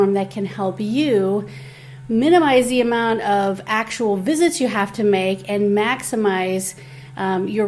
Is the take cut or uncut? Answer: uncut